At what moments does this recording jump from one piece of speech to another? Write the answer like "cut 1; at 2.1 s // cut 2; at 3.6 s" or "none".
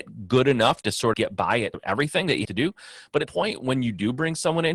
cut 1; at 1.1 s // cut 2; at 1.7 s // cut 3; at 2.4 s // cut 4; at 3.3 s